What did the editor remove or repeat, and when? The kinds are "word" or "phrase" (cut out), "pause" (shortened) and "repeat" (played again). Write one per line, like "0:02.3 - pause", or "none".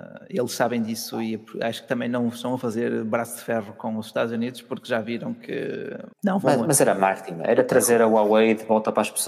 0:06.1 - pause